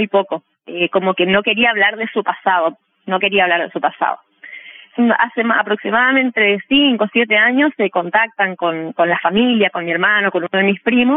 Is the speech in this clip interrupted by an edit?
no; 0 cuts

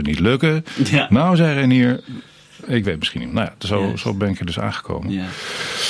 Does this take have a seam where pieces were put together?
no; 0 cuts

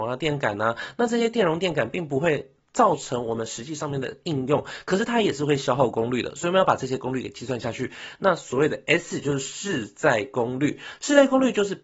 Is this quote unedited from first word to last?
yes; 0 cuts

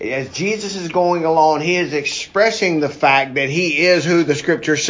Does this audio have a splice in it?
no; 0 cuts

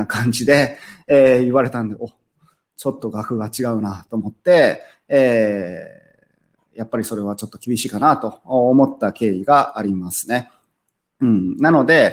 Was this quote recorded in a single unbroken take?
yes; 0 cuts

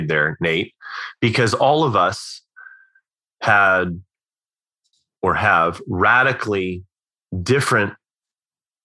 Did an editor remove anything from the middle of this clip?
no; 0 cuts

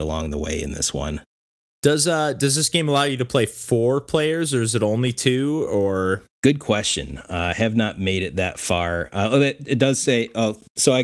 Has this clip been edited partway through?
no; 0 cuts

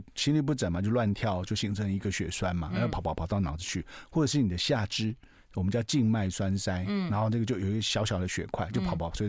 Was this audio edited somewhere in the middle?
no; 0 cuts

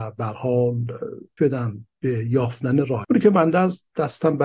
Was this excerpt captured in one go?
no; 2 cuts; at 1.4 s, 3.0 s

